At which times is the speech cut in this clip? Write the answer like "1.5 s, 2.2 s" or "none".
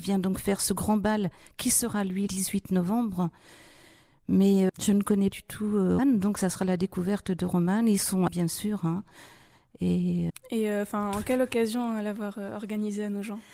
2.3 s, 4.7 s, 5.3 s, 6.0 s, 8.3 s, 10.3 s